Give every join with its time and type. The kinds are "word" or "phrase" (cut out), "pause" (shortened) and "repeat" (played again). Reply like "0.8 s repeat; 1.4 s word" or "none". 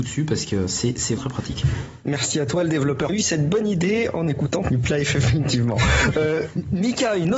1.2 s word; 3.1 s phrase; 4.6 s word